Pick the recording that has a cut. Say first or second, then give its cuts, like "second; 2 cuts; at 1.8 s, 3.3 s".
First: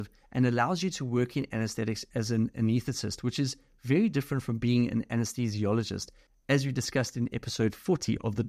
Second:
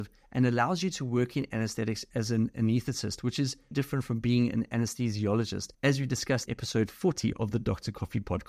second; 3 cuts; at 3.7 s, 5.7 s, 6.5 s